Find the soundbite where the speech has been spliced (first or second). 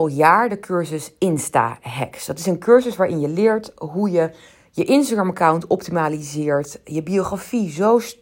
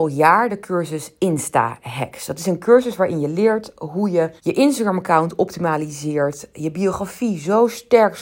second